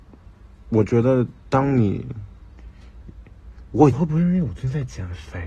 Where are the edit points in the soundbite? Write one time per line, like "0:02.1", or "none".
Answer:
0:03.9